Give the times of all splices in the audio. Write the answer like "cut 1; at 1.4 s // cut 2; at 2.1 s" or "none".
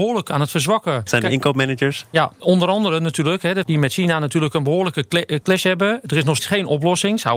cut 1; at 1.1 s // cut 2; at 2.4 s // cut 3; at 3.6 s // cut 4; at 5.4 s // cut 5; at 6.4 s